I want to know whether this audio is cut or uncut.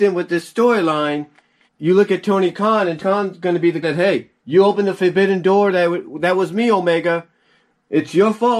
cut